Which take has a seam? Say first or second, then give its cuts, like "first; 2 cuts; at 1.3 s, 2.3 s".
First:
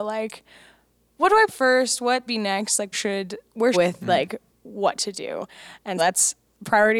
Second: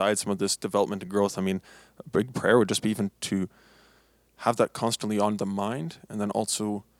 first; 6 cuts; at 1.5 s, 2.3 s, 2.9 s, 3.7 s, 4.5 s, 6.0 s